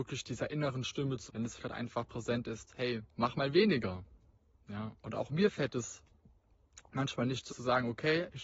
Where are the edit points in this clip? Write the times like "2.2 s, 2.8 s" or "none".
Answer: 1.3 s, 1.6 s, 3.1 s, 5.0 s, 7.5 s